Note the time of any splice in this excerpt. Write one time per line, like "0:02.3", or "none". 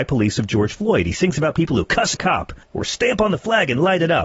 0:02.1
0:02.6